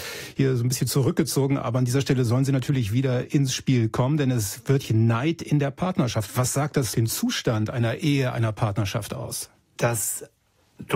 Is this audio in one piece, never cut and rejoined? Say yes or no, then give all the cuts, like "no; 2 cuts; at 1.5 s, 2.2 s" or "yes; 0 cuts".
no; 2 cuts; at 4.8 s, 6.9 s